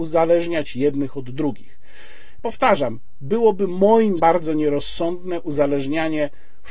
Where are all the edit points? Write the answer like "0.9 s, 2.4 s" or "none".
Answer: 2.4 s, 4.2 s